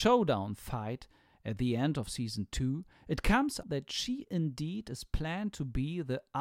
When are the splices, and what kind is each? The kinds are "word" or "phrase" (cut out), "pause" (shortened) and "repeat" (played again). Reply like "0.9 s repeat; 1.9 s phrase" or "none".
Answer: 3.6 s word